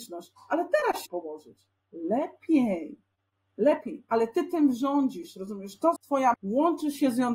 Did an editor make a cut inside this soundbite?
yes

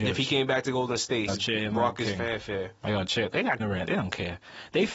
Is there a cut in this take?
yes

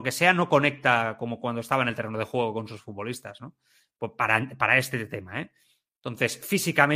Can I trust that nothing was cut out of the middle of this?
yes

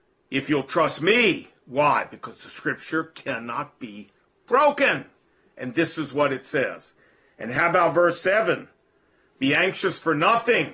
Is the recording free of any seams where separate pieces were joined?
yes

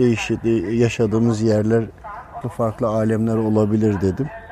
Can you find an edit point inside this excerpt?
yes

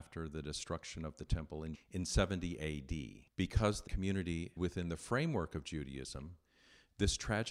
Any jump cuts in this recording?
yes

